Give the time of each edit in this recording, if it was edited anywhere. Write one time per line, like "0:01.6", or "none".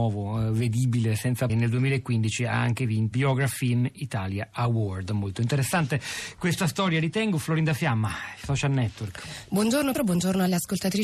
0:01.5
0:03.1
0:09.9